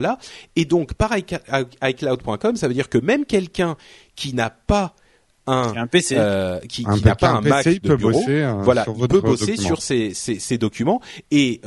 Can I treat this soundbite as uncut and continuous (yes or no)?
yes